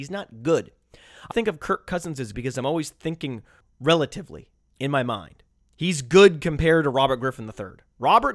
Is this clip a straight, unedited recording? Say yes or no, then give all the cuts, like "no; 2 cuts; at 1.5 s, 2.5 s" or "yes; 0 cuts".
no; 2 cuts; at 1.3 s, 2.3 s